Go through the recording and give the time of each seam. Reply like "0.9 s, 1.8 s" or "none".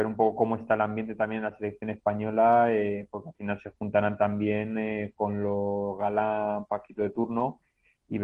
none